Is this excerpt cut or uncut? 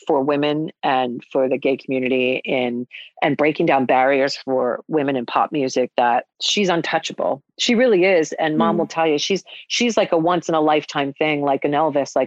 cut